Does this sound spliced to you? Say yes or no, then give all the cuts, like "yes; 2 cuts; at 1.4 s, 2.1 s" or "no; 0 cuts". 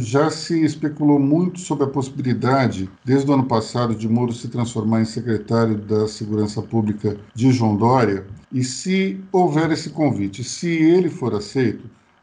yes; 3 cuts; at 3.0 s, 7.3 s, 8.4 s